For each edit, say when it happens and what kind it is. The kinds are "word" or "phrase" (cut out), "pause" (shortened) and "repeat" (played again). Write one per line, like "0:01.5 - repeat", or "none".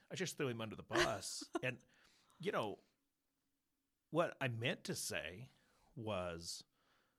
none